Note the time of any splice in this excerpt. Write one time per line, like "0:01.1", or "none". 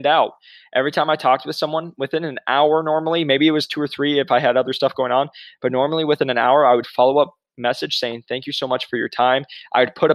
0:06.8